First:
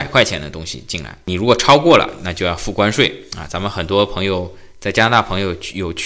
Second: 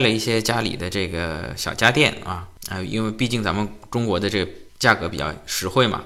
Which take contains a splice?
second; 1 cut; at 4.7 s

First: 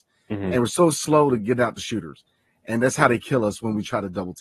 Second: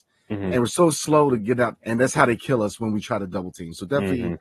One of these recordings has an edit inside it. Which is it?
second; 1 cut; at 1.7 s

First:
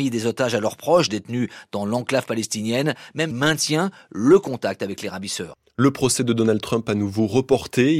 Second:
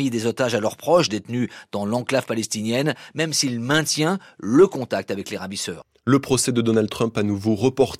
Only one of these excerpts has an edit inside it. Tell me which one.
first; 1 cut; at 3.3 s

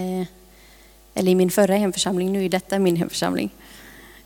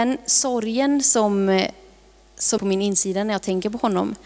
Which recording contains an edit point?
second; 1 cut; at 2.6 s

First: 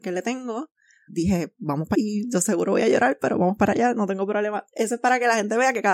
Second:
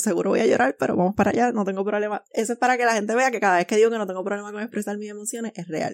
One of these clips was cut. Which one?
first; 2 cuts; at 1.1 s, 1.9 s

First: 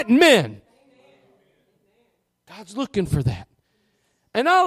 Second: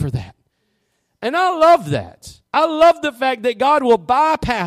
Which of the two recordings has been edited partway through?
second; 1 cut; at 2.5 s

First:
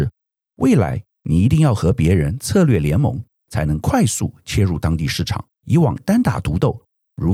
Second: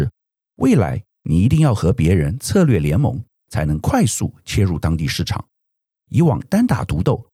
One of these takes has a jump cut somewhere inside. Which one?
first; 1 cut; at 5.5 s

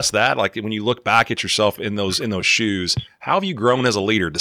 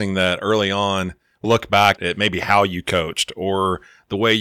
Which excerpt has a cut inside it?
second; 2 cuts; at 1.4 s, 2.0 s

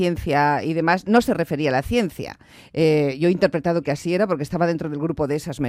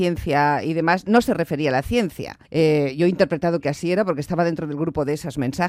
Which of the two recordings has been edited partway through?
second; 1 cut; at 2.4 s

